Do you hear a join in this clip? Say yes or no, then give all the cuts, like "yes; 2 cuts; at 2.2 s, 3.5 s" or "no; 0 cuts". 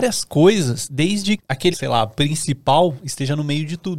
yes; 2 cuts; at 1.4 s, 1.7 s